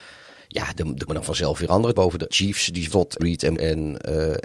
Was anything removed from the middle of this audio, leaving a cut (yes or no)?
yes